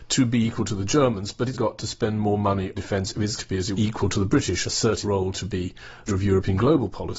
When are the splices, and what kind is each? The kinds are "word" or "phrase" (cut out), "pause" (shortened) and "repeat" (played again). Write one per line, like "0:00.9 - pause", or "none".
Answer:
0:01.5 - word
0:02.8 - word
0:03.4 - word
0:03.7 - word
0:04.6 - word
0:05.0 - word
0:06.1 - word